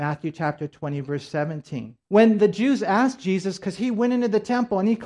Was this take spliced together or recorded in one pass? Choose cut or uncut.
cut